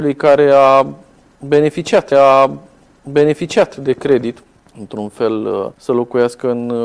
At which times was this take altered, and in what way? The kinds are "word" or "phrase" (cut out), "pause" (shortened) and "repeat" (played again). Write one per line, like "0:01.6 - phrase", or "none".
0:02.1 - repeat
0:04.6 - pause
0:05.7 - pause